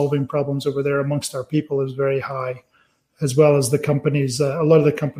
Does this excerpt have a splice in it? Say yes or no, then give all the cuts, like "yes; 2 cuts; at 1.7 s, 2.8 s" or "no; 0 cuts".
no; 0 cuts